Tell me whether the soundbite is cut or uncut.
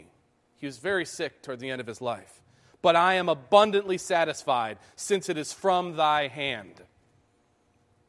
uncut